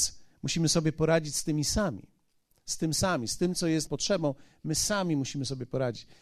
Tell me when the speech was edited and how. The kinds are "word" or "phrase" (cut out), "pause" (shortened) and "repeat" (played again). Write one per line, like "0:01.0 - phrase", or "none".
0:03.9 - word